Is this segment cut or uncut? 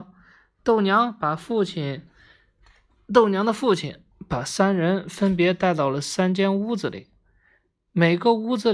uncut